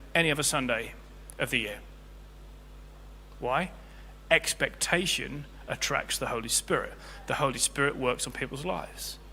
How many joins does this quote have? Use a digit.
0